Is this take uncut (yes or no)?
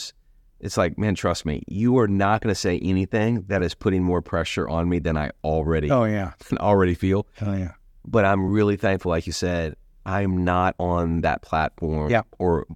yes